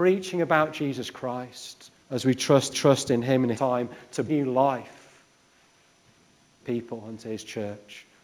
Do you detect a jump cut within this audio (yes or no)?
yes